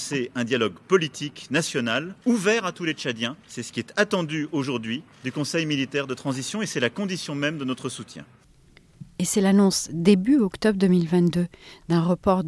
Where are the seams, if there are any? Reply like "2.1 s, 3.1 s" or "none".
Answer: 2.2 s, 3.4 s, 5.1 s

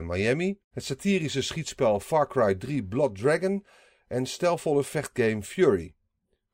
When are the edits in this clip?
none

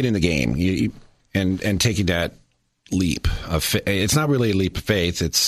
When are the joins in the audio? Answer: none

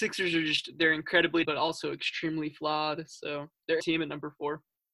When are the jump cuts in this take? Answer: 1.4 s, 3.8 s

